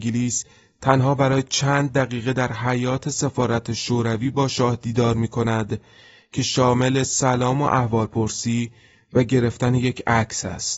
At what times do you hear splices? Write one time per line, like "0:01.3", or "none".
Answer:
none